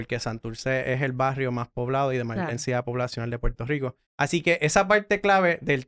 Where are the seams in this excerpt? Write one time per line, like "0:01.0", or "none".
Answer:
0:04.1